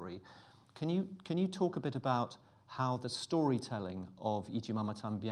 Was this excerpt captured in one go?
yes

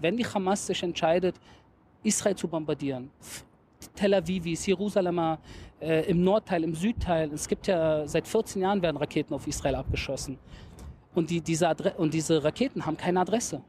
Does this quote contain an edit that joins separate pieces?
no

